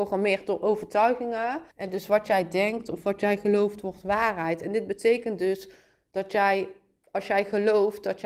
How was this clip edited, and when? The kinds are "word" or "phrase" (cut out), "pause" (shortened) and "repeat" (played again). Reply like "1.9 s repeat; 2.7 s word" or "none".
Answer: 1.7 s pause